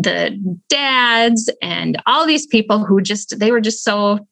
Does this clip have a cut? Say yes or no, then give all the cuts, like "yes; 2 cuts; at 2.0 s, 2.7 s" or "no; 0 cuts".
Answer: no; 0 cuts